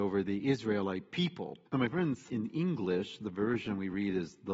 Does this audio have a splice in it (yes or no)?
yes